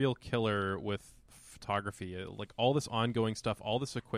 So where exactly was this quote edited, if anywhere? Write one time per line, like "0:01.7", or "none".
none

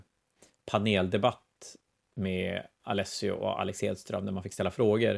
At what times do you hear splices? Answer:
none

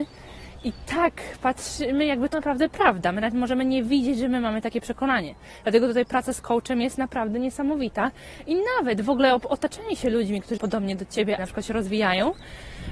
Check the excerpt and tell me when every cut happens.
0:02.3
0:10.6
0:11.4

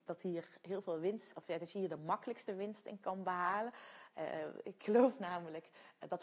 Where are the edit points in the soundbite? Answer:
none

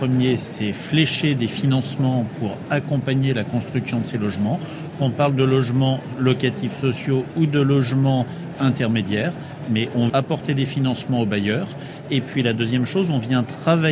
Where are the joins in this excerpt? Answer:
0:08.5
0:10.1

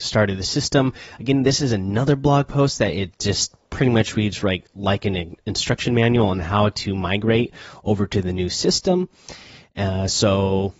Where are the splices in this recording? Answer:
none

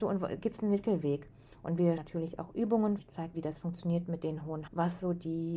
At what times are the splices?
0:02.0
0:03.0
0:03.3
0:04.7

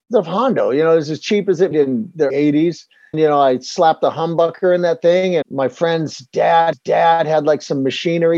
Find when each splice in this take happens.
0:01.7
0:02.3
0:03.1
0:05.4
0:06.7

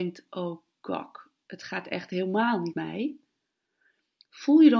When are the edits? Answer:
0:02.7

